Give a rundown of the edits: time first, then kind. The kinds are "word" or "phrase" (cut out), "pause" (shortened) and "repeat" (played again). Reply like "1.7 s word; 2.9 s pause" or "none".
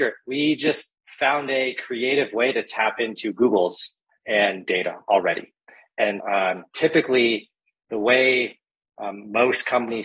4.1 s word; 6.2 s word